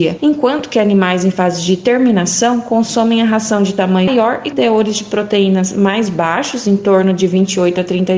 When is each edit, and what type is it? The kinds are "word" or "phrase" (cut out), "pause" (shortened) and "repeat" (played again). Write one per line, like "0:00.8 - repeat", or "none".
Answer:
0:04.1 - word
0:04.5 - word